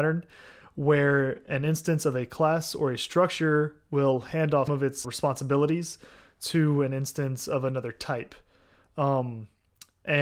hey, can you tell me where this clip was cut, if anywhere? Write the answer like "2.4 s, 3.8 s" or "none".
4.7 s, 5.0 s

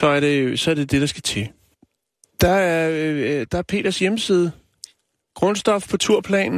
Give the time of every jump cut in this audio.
none

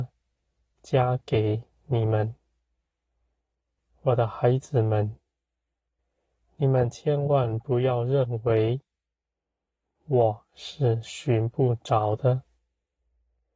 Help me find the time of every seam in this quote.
none

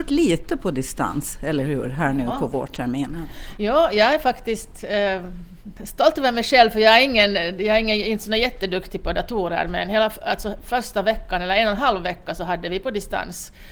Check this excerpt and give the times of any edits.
none

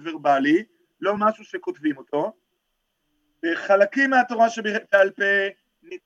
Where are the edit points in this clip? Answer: none

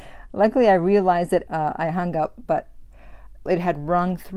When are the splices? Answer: 1.5 s, 3.5 s

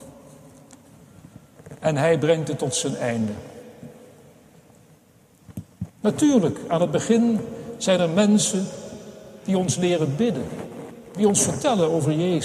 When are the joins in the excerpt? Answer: 5.9 s

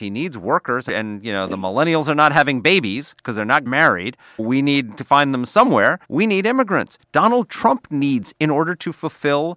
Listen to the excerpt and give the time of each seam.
3.7 s, 4.4 s, 6.0 s, 8.3 s

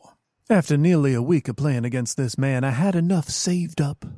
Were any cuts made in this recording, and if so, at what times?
none

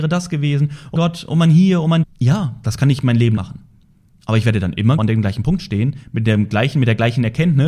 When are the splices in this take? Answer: 1.0 s, 2.0 s, 3.4 s, 5.0 s

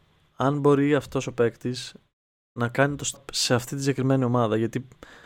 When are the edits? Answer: 3.1 s

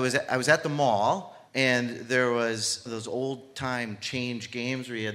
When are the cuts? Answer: 1.5 s, 2.9 s

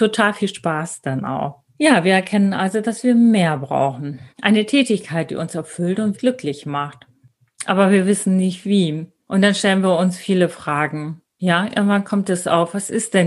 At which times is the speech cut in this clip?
1.7 s, 4.3 s, 6.1 s

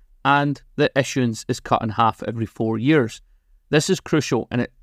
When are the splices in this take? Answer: none

